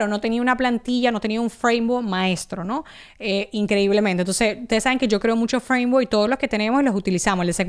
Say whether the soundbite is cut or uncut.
uncut